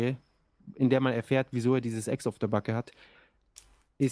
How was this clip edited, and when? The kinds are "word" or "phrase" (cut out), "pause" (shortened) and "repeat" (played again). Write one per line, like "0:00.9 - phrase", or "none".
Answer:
none